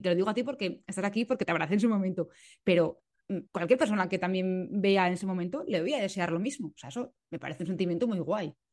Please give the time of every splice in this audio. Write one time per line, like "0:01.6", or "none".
0:03.5
0:07.2